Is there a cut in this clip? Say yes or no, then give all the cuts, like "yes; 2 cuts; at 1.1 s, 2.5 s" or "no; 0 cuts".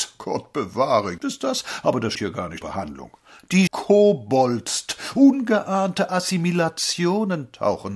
yes; 4 cuts; at 1.2 s, 2.1 s, 2.6 s, 3.7 s